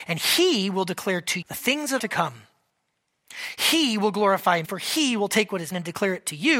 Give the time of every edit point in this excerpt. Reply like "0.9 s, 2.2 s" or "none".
1.4 s, 2.0 s, 4.6 s, 5.7 s

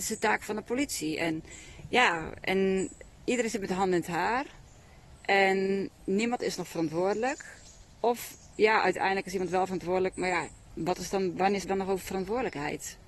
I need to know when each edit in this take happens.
11.6 s

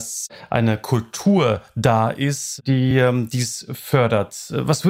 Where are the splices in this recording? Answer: none

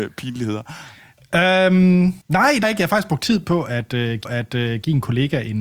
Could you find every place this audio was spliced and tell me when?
2.2 s, 2.6 s, 4.2 s

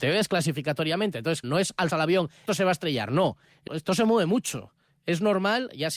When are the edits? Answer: 1.4 s, 1.9 s, 2.5 s, 3.7 s

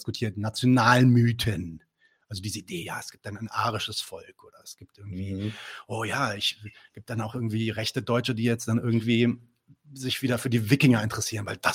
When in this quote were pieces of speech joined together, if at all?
none

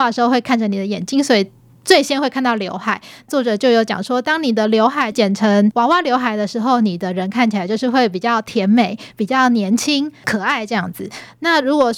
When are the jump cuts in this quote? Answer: none

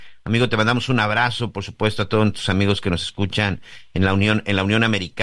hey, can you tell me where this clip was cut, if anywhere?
none

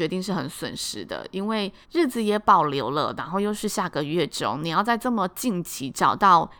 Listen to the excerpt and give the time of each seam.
1.8 s

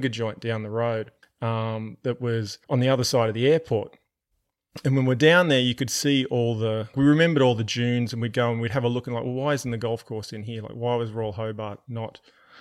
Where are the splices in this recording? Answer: 1.2 s, 2.6 s, 6.9 s

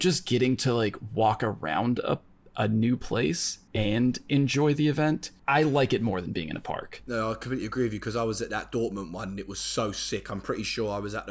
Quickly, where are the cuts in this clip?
none

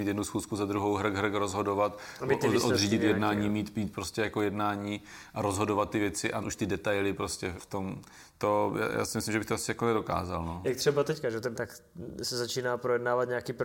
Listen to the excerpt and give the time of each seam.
6.4 s, 7.6 s, 11.5 s

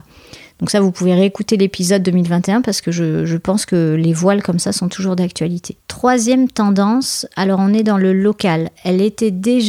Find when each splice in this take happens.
5.8 s

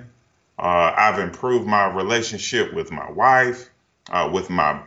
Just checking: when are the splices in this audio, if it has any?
none

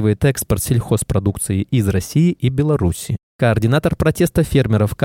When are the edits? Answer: none

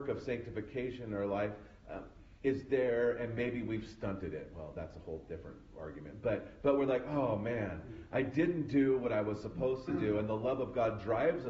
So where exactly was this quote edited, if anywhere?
2.4 s

